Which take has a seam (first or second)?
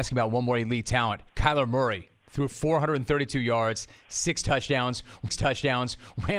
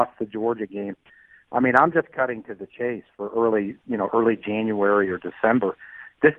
first